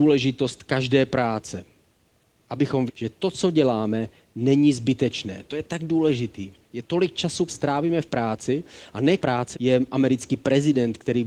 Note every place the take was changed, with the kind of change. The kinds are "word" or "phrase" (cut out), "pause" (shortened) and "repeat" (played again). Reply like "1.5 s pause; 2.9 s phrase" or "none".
2.9 s word; 7.5 s word; 9.2 s word; 9.5 s word

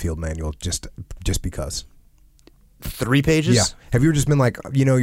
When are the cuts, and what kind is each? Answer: none

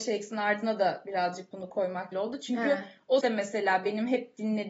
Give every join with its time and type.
2.1 s word; 3.2 s word

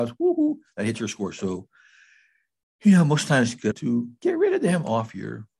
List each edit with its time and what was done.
3.7 s word

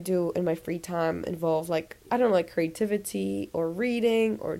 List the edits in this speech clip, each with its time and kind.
2.0 s pause

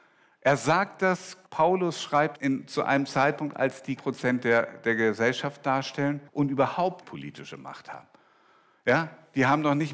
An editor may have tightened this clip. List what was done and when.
1.5 s pause; 2.4 s word; 4.0 s phrase; 6.3 s pause; 7.0 s word

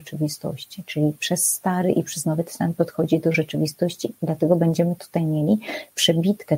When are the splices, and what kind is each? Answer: none

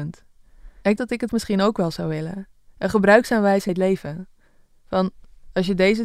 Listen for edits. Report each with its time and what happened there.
1.0 s word; 1.3 s word; 3.7 s word

